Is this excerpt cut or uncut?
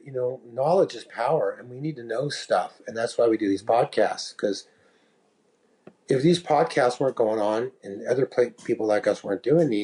uncut